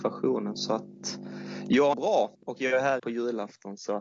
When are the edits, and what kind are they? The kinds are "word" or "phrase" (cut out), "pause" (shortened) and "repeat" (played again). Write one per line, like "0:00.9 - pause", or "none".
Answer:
0:01.9 - phrase
0:02.3 - pause
0:03.0 - phrase